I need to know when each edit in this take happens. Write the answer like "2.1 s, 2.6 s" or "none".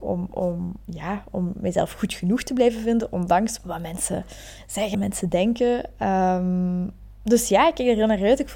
3.6 s, 4.9 s